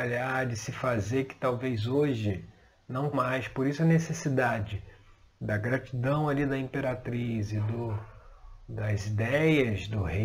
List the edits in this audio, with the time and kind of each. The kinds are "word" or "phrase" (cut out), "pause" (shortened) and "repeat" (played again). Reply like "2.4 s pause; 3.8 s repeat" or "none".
3.1 s word